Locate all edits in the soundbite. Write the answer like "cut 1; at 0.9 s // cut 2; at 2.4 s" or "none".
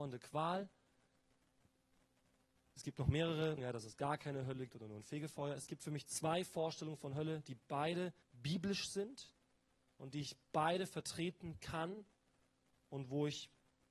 cut 1; at 3.6 s // cut 2; at 4.7 s // cut 3; at 8.2 s